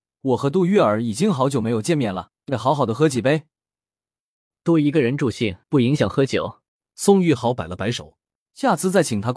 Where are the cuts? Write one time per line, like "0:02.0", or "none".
0:02.4
0:05.6
0:06.7
0:08.5